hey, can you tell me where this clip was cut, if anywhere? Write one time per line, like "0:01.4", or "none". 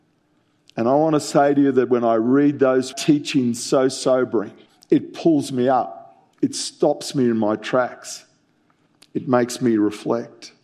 0:02.9
0:04.7
0:06.3